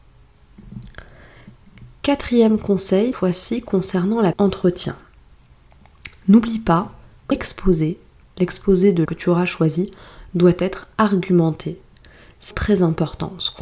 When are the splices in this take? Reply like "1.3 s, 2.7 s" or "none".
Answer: 3.1 s, 4.3 s, 7.3 s, 9.1 s, 12.5 s